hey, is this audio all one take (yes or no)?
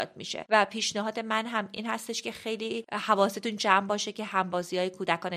yes